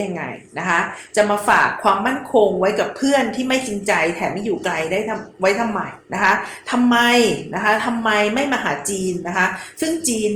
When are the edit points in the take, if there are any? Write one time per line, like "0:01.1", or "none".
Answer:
0:06.0